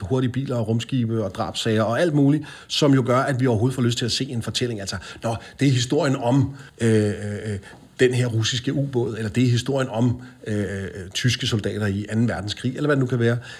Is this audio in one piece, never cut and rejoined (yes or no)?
no